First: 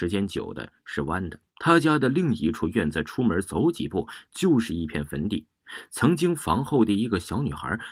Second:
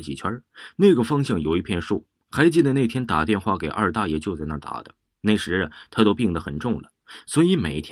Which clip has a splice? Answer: first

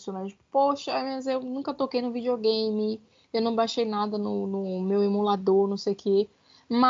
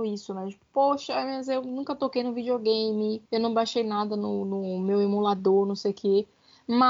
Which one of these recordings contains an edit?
second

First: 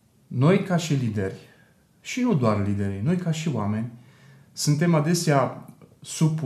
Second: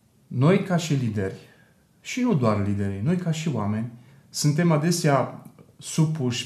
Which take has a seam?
second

